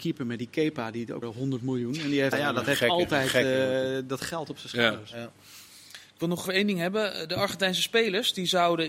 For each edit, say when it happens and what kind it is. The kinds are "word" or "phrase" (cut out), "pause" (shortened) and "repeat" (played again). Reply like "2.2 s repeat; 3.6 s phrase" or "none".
1.2 s word; 2.3 s word; 6.5 s word